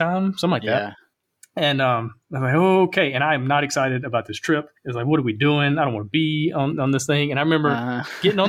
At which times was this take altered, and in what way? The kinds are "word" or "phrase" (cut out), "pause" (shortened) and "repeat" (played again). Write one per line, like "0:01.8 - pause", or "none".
0:04.8 - pause